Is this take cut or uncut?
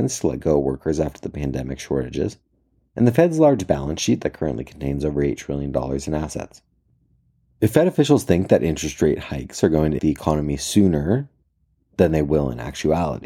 cut